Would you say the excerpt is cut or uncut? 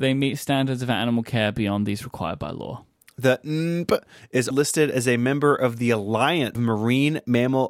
cut